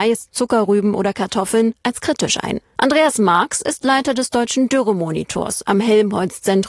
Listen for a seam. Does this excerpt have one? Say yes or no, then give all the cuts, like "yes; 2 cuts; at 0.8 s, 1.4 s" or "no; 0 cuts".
no; 0 cuts